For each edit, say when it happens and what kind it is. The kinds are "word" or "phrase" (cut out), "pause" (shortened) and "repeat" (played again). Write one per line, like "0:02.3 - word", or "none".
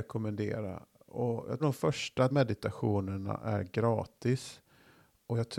0:01.6 - word
0:02.3 - word